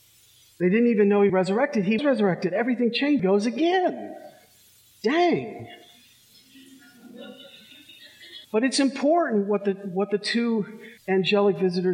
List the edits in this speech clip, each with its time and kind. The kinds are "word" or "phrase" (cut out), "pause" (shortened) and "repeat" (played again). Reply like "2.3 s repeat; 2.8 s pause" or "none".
1.3 s phrase; 2.0 s word; 3.2 s phrase; 8.4 s pause; 11.0 s pause